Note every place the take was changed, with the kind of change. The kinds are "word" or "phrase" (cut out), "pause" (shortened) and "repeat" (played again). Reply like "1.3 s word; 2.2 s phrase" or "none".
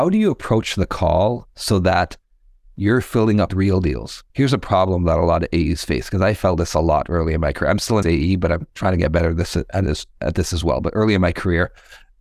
3.5 s phrase; 4.3 s pause; 8.0 s word; 8.7 s pause